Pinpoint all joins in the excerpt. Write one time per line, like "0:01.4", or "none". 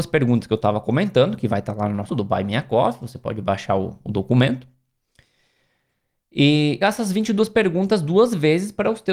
0:02.1
0:06.8